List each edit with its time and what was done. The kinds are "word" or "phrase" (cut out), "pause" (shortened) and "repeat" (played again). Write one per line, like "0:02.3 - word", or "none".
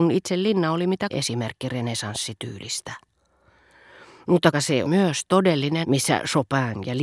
0:01.1 - word
0:04.5 - word
0:04.8 - word
0:05.8 - word

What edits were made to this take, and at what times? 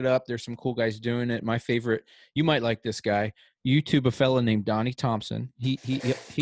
none

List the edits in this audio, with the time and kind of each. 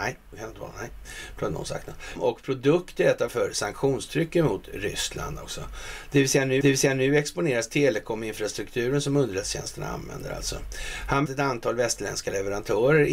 0:02.2 - word
0:03.3 - word
0:06.6 - repeat
0:11.3 - phrase

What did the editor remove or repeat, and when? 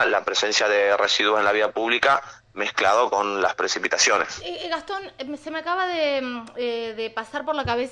none

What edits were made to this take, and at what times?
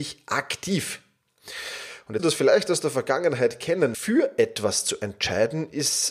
0:02.2 - word
0:03.9 - word

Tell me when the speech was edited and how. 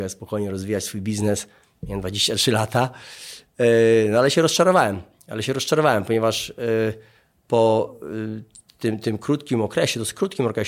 none

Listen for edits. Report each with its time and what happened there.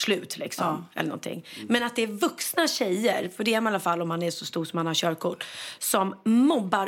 none

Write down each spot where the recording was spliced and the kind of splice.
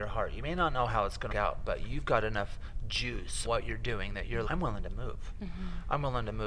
0:01.3 - phrase
0:03.4 - word
0:04.4 - word

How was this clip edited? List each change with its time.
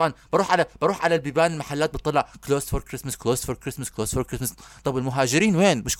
none

